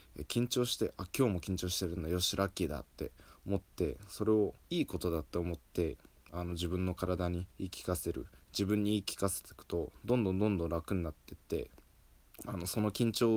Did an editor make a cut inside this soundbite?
yes; 2 cuts; at 4.6 s, 7.5 s

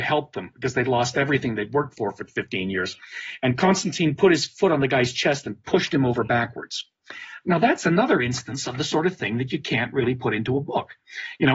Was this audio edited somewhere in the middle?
no; 0 cuts

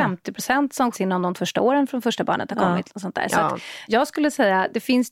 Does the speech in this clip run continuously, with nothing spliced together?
no; 3 cuts; at 0.9 s, 1.3 s, 3.9 s

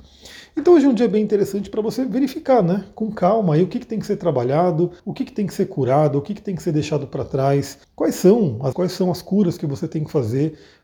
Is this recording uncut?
no; 3 cuts; at 5.0 s, 7.8 s, 8.7 s

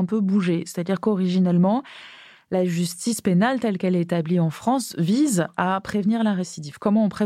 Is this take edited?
no; 0 cuts

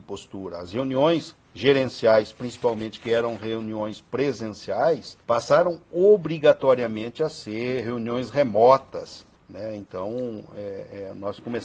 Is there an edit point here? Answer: yes; 3 cuts; at 1.4 s, 5.2 s, 9.3 s

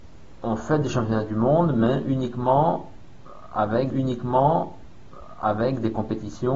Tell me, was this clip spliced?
yes; 1 cut; at 3.9 s

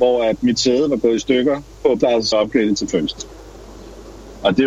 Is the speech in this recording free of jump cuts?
no; 2 cuts; at 2.0 s, 2.3 s

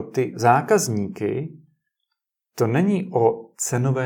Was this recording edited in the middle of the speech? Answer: no; 0 cuts

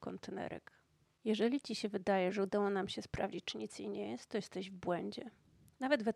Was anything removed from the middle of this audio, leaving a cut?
no; 0 cuts

